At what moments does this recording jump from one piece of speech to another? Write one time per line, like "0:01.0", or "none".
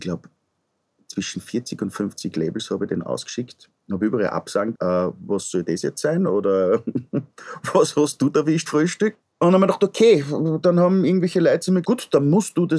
0:04.7
0:08.7
0:11.8